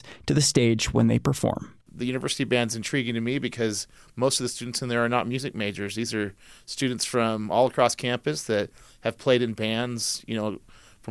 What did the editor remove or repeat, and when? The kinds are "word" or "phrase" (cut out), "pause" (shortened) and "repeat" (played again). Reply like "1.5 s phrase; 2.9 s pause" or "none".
none

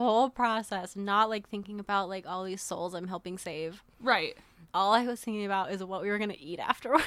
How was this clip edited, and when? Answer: 4.7 s pause

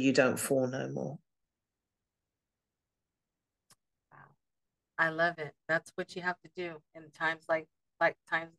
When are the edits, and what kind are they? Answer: none

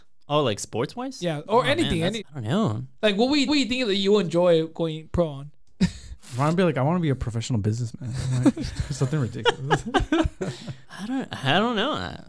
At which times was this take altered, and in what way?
2.2 s word; 3.0 s pause; 3.5 s repeat; 5.6 s pause; 10.8 s pause

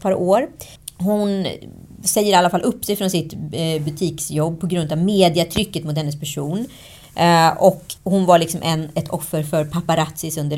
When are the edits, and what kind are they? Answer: 8.0 s pause

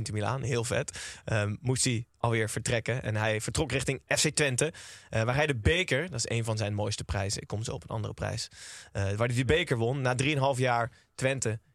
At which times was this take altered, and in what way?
none

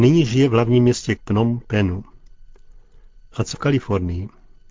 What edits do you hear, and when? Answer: 1.2 s word; 3.5 s word

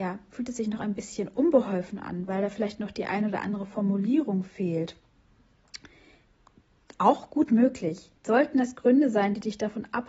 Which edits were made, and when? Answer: 8.2 s pause

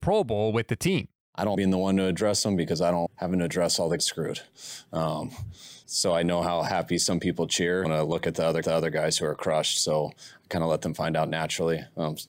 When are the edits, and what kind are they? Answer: 1.5 s word; 3.1 s word; 4.0 s phrase; 5.8 s pause; 7.8 s phrase; 8.6 s repeat

